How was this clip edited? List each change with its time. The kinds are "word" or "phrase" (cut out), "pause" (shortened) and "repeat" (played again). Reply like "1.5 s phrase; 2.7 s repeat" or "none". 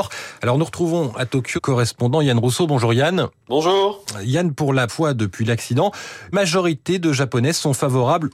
1.6 s word; 4.9 s word; 6.3 s word